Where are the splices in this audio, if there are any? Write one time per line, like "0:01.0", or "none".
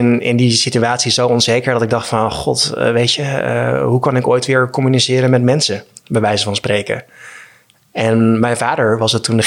none